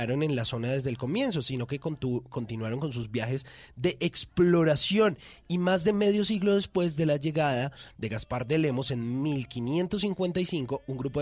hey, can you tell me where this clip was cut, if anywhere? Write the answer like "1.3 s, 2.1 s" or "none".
none